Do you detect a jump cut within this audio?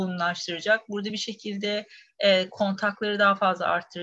no; 0 cuts

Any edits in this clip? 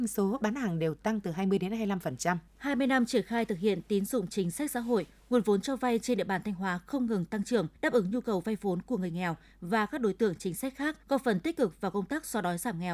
yes; 3 cuts; at 2.5 s, 7.8 s, 11.0 s

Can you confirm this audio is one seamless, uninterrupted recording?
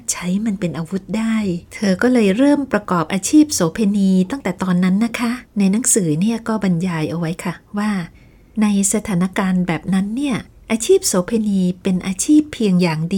no; 2 cuts; at 1.6 s, 5.5 s

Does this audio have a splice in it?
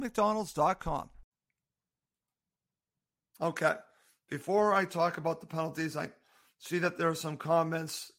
no; 0 cuts

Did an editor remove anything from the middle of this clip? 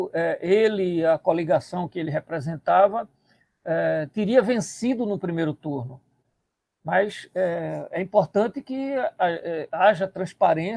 no; 0 cuts

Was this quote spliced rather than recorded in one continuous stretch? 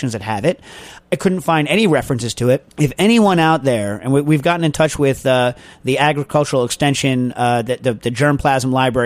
yes; 1 cut; at 2.7 s

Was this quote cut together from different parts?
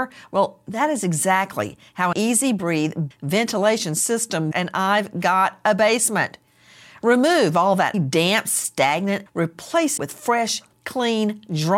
yes; 6 cuts; at 2.1 s, 3.1 s, 4.5 s, 7.9 s, 9.3 s, 10.0 s

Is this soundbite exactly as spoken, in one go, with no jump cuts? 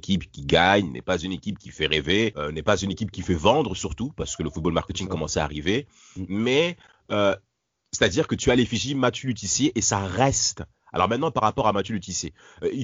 yes; 0 cuts

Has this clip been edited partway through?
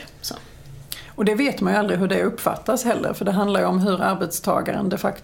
no; 0 cuts

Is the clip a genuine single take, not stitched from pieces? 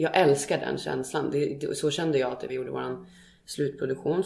no; 1 cut; at 2.5 s

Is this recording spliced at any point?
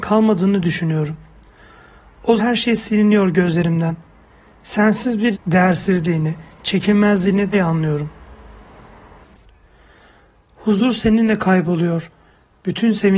yes; 3 cuts; at 2.4 s, 5.3 s, 7.5 s

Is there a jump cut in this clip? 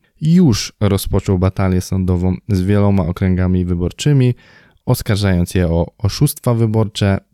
no; 0 cuts

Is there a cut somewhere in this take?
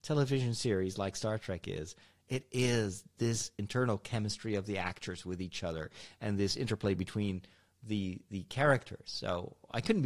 no; 0 cuts

